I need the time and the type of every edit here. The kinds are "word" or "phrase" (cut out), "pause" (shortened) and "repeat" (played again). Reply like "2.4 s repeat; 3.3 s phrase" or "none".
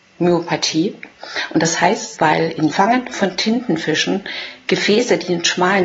2.1 s word; 2.7 s phrase